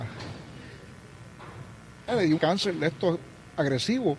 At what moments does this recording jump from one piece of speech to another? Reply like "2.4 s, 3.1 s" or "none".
2.4 s